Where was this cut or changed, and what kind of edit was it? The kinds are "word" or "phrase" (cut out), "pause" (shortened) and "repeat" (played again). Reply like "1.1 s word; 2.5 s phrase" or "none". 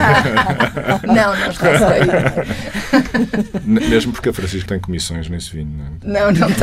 4.7 s word